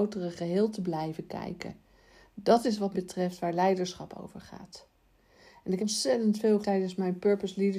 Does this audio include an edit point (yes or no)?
yes